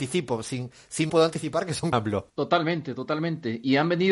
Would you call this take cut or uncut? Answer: cut